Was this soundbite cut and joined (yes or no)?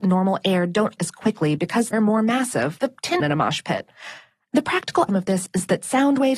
yes